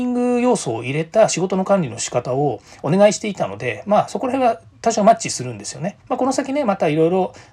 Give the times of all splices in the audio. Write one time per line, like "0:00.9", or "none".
0:06.0